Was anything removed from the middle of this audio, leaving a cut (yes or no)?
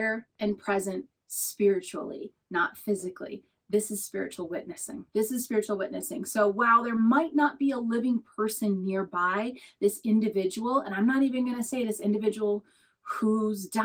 yes